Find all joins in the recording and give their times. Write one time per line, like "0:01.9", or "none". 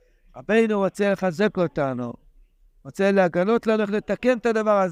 none